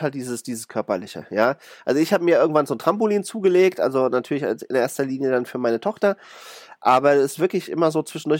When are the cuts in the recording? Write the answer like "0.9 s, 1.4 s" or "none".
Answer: none